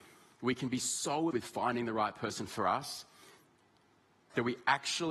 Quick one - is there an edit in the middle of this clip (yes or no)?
yes